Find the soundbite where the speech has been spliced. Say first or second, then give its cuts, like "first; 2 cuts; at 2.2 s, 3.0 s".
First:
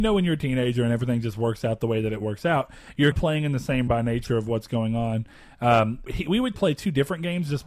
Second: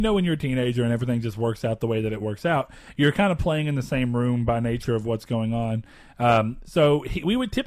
first; 4 cuts; at 3.1 s, 3.9 s, 6.1 s, 6.5 s